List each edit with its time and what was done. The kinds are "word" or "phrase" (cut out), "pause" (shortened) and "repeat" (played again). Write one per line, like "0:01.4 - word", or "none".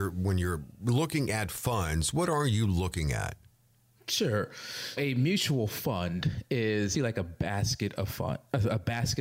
0:05.0 - word
0:06.9 - word